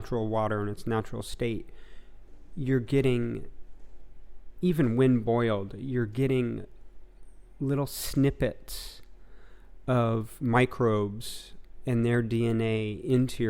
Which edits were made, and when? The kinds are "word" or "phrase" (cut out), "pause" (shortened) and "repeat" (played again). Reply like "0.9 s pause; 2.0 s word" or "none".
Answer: none